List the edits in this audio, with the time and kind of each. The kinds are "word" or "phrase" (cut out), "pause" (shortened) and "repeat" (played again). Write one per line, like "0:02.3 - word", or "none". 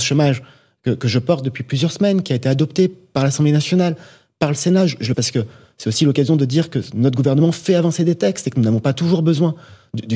0:05.1 - word